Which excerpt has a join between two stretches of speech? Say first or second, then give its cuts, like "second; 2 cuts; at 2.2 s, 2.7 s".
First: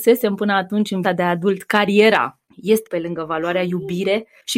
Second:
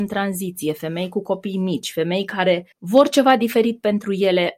first; 2 cuts; at 1.0 s, 2.8 s